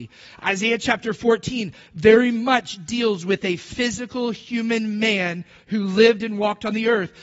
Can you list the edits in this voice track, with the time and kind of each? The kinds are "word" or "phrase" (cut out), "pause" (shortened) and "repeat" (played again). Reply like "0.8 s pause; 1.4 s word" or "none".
none

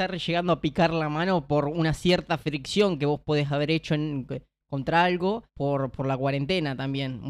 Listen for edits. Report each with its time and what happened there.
5.5 s pause

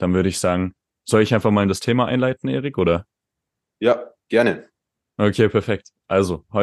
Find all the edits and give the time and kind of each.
none

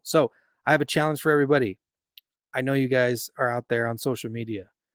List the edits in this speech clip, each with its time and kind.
none

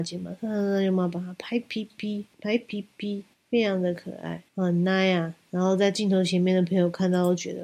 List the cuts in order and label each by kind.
2.3 s pause; 3.3 s pause; 4.5 s pause

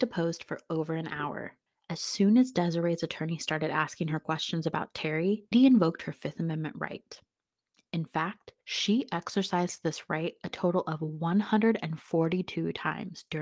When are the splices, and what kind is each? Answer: 5.5 s word; 8.6 s pause

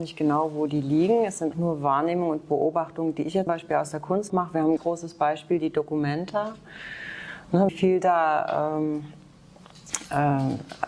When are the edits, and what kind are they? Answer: 1.5 s word; 3.5 s word; 4.3 s word; 4.8 s word; 7.7 s word

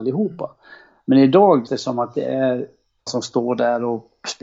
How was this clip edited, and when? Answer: 1.7 s word; 3.1 s word

